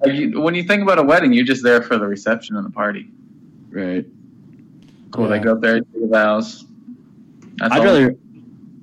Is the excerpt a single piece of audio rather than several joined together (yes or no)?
yes